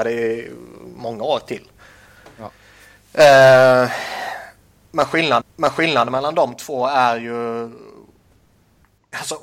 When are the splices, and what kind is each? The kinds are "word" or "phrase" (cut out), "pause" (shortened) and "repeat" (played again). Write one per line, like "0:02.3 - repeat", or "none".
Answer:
0:05.4 - repeat